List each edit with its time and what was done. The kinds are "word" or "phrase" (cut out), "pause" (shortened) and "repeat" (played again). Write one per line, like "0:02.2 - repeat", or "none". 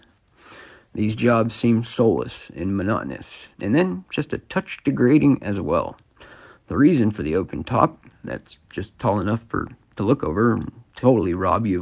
0:03.5 - pause